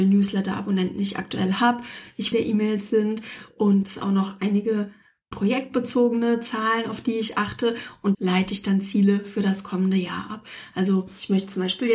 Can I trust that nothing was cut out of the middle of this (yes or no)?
no